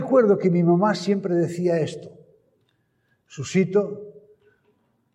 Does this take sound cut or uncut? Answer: uncut